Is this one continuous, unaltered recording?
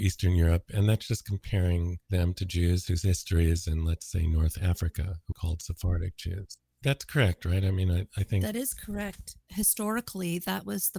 no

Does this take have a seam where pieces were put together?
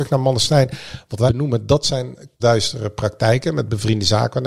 yes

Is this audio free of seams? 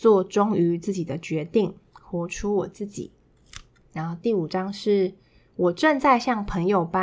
yes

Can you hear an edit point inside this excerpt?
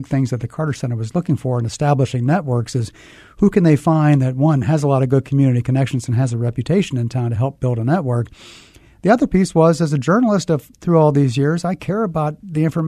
no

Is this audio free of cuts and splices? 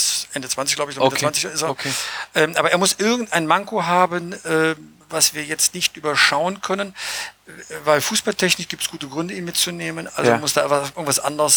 no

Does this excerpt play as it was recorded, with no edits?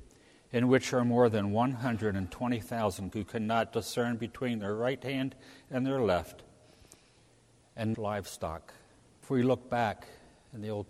no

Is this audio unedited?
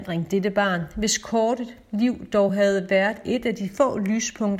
yes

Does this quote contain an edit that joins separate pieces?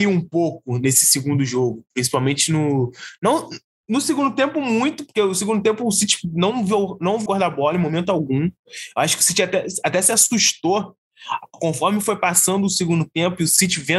yes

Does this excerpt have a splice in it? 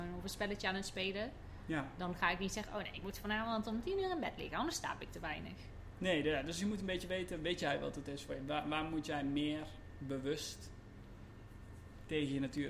no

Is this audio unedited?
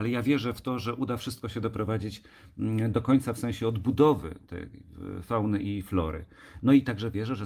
yes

